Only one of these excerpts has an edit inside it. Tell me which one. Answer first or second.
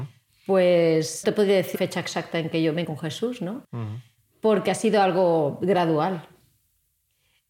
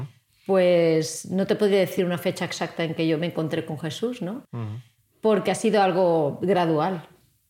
first